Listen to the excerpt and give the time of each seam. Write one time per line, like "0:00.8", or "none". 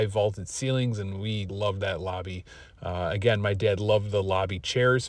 0:01.5